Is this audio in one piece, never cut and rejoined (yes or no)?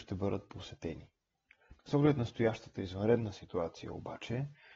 no